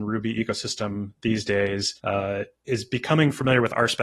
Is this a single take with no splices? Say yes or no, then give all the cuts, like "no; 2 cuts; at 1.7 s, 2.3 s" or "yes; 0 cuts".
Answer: no; 1 cut; at 2.0 s